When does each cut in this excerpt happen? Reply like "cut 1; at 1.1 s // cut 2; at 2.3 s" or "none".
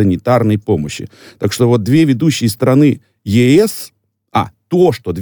none